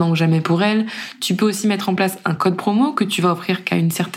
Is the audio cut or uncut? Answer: uncut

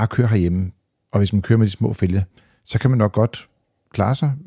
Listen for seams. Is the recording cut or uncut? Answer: uncut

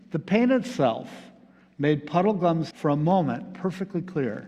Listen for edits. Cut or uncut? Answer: cut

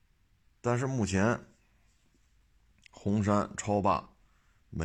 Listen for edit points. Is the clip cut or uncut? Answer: uncut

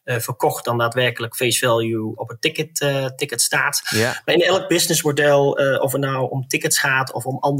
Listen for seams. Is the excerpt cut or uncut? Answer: cut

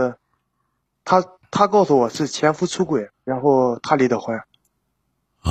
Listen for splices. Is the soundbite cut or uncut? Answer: cut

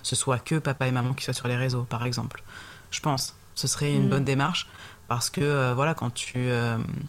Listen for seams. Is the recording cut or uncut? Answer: uncut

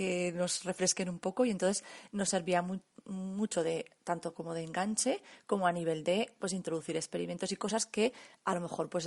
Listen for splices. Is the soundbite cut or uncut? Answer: uncut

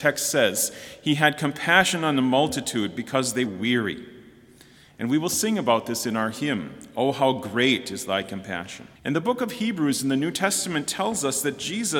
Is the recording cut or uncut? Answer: cut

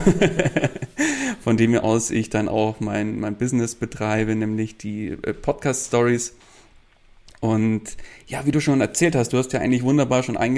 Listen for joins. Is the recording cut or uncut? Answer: uncut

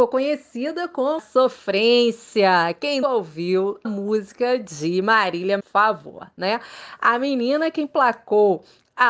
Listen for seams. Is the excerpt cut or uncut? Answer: cut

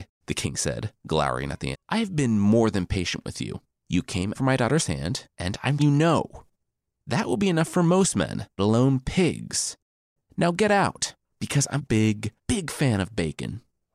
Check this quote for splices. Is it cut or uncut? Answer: cut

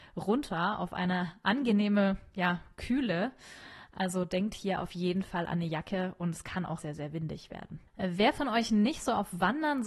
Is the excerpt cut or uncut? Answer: cut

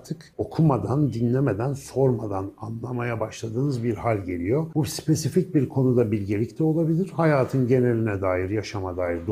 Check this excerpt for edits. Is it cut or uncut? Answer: uncut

